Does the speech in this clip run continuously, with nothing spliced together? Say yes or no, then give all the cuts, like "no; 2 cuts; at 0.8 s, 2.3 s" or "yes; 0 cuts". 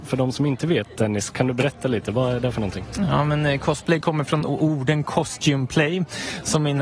yes; 0 cuts